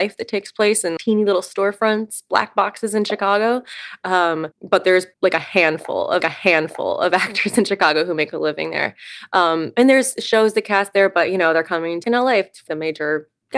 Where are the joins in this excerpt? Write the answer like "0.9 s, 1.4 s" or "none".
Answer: 1.0 s, 4.5 s, 5.1 s, 6.2 s, 12.0 s, 12.7 s